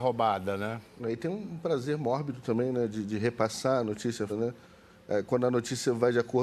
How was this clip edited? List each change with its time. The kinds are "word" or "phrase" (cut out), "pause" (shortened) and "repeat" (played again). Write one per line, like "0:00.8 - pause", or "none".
0:04.3 - word

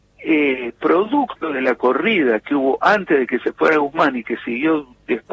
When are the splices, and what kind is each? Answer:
none

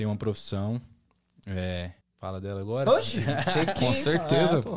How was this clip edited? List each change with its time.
0:02.0 - pause

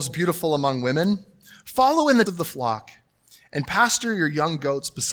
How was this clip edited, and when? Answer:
0:02.3 - word

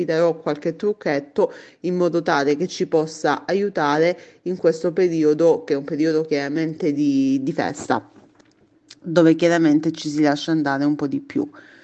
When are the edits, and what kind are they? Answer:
none

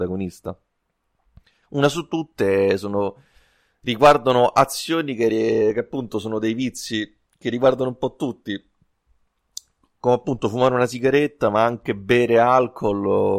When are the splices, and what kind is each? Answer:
0:07.3 - pause

